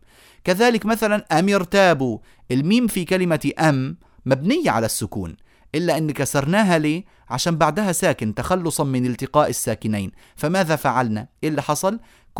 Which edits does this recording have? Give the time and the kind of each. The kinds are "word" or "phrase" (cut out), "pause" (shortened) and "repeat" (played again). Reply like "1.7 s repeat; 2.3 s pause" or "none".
none